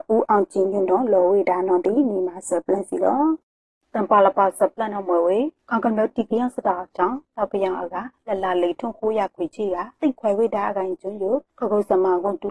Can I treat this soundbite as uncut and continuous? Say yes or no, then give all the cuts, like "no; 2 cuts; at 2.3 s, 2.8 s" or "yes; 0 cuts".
yes; 0 cuts